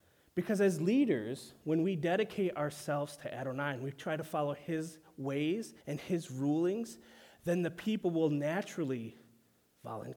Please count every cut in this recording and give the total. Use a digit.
1